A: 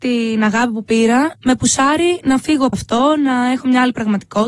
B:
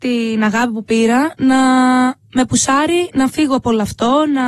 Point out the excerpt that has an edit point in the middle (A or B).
A